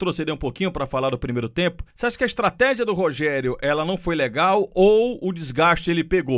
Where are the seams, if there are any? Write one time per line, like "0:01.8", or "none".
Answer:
0:01.9